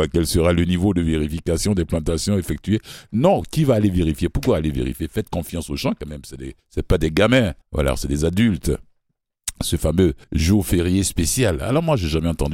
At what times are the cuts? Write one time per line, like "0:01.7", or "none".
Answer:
0:06.6
0:07.6
0:10.2